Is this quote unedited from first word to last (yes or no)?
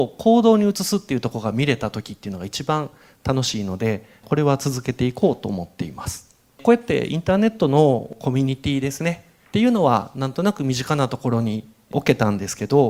yes